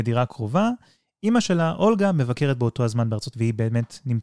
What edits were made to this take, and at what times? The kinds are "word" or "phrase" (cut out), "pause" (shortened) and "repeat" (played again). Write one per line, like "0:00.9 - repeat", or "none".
0:03.3 - word